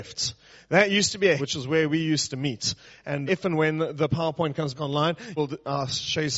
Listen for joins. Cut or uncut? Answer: cut